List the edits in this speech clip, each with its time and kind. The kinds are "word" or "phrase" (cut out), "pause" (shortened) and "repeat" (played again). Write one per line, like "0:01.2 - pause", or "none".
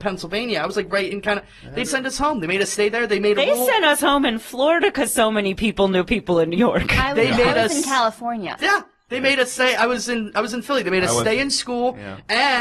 0:01.8 - word
0:08.6 - word